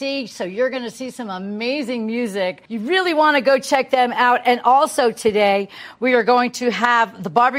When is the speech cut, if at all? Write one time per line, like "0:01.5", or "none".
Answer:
0:02.7